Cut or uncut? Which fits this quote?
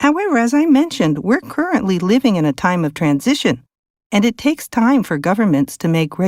uncut